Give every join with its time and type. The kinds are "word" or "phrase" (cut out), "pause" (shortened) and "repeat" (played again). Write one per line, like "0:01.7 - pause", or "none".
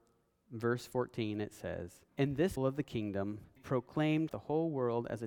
0:02.1 - pause
0:02.6 - word
0:03.6 - phrase
0:04.3 - word